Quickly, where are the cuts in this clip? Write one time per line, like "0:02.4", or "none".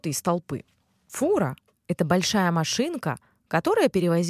none